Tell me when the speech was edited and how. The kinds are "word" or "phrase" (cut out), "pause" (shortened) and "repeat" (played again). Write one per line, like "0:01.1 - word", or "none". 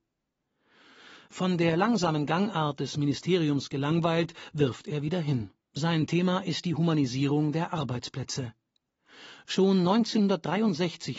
0:05.6 - pause